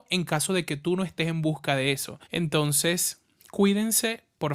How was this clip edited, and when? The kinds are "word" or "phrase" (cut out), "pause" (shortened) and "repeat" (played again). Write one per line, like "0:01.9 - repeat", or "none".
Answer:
0:02.2 - pause